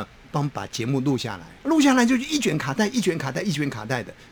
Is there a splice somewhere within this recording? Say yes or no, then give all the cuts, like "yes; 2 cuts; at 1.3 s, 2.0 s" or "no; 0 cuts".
yes; 1 cut; at 1.6 s